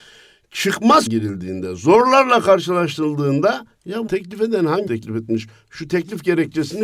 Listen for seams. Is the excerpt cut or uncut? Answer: cut